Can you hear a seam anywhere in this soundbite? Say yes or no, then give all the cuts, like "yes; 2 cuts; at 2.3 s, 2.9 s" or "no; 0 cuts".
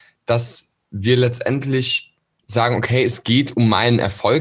yes; 1 cut; at 2.4 s